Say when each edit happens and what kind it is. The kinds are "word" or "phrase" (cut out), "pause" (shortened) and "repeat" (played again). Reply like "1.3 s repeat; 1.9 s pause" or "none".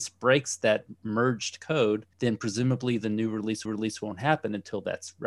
2.1 s pause; 3.7 s repeat